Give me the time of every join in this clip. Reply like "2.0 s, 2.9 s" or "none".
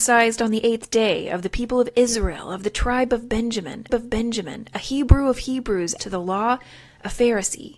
3.9 s, 6.0 s